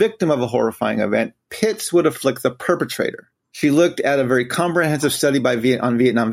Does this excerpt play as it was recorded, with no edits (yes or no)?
no